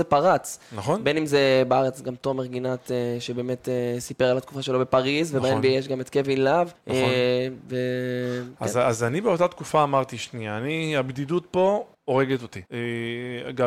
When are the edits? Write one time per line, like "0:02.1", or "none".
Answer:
0:06.8
0:11.9
0:12.7